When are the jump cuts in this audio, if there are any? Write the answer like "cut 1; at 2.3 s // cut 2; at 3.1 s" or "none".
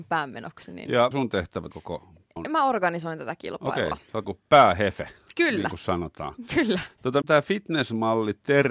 cut 1; at 1.1 s // cut 2; at 1.7 s // cut 3; at 2.4 s // cut 4; at 4.2 s // cut 5; at 7.2 s